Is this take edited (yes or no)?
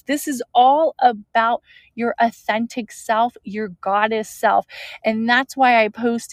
no